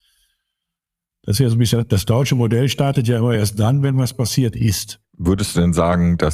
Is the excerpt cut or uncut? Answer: uncut